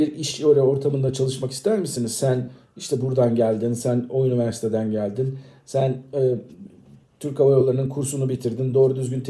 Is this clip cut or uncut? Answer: uncut